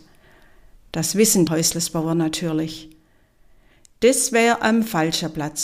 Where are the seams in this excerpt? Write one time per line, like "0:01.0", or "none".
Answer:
0:01.5